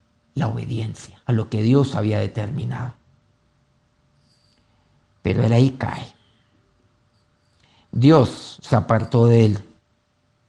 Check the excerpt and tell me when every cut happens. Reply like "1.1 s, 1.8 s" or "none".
1.2 s